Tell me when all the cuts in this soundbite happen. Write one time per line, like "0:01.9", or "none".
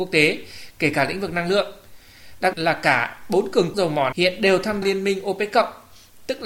0:02.5
0:03.7
0:04.1
0:04.8